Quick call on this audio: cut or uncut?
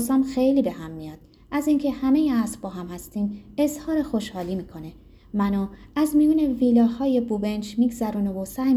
uncut